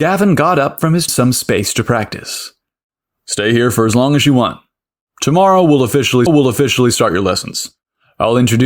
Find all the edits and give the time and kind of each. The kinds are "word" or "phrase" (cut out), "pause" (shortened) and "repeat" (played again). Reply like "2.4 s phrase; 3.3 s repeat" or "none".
1.1 s phrase; 6.3 s repeat